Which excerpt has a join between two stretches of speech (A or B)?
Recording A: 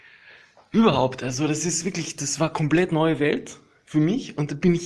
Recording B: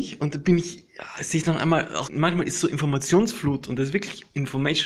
B